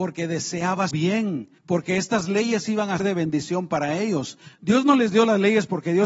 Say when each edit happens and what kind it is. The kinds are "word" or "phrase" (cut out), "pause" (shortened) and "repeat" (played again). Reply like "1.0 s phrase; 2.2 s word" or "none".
0.9 s word; 1.6 s pause; 3.0 s word

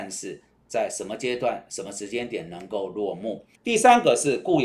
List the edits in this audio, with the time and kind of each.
3.5 s pause

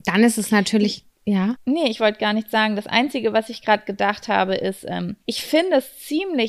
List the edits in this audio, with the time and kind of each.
1.1 s pause; 5.2 s pause

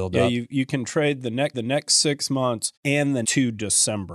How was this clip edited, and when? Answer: 1.5 s repeat; 2.8 s pause; 3.2 s word

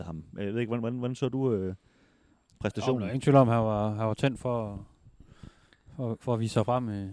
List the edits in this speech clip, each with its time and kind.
none

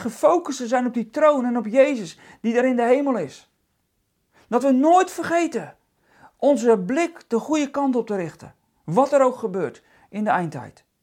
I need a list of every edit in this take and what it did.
none

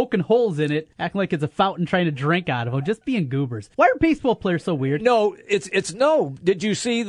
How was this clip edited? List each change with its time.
0.9 s pause; 3.7 s pause

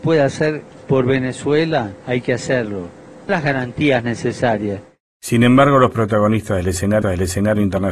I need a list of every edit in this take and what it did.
2.0 s pause; 3.3 s word; 5.9 s word; 7.0 s repeat

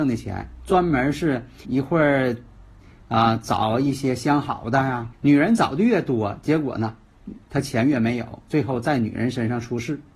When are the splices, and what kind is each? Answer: 1.6 s word; 5.1 s phrase; 7.4 s pause

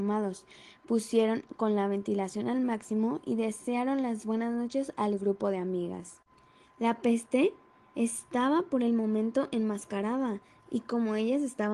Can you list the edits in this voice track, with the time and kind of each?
none

